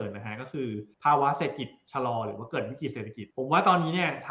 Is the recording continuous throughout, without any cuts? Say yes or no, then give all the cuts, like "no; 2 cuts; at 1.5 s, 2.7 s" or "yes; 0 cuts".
no; 2 cuts; at 0.9 s, 3.3 s